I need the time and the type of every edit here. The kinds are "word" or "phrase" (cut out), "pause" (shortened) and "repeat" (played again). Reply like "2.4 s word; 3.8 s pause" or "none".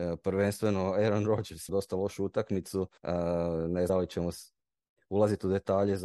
1.7 s phrase; 3.0 s pause; 3.9 s phrase